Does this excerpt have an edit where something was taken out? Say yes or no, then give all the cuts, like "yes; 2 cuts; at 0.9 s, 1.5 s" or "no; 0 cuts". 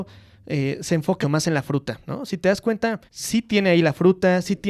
yes; 2 cuts; at 1.2 s, 3.1 s